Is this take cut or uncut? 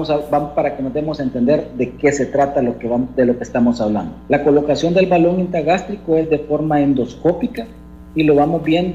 cut